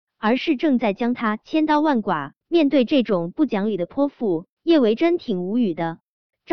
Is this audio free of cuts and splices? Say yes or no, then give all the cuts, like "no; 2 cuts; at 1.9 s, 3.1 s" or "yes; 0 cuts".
no; 2 cuts; at 2.4 s, 4.6 s